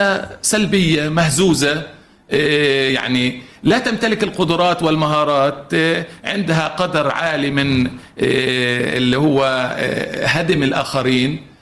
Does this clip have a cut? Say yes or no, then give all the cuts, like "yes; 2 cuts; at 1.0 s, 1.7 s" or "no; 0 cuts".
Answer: no; 0 cuts